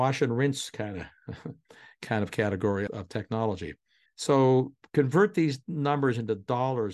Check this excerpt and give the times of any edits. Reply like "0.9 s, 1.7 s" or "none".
2.9 s, 4.1 s